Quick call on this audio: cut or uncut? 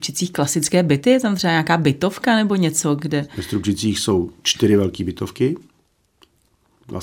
uncut